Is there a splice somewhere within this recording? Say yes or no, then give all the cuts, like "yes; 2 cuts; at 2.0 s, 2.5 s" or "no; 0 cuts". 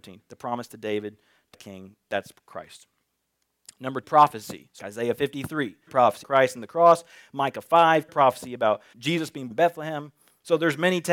yes; 8 cuts; at 1.5 s, 4.0 s, 4.8 s, 5.9 s, 6.2 s, 8.1 s, 8.9 s, 9.5 s